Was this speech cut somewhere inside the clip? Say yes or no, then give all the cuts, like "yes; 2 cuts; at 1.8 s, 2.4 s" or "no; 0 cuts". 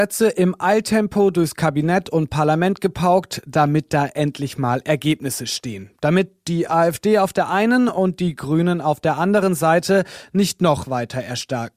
no; 0 cuts